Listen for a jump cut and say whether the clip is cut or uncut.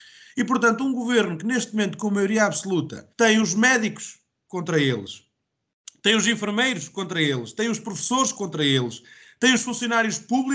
cut